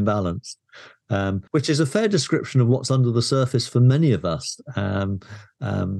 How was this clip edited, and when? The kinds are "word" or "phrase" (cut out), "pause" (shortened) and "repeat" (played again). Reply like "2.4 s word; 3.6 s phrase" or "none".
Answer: 1.5 s pause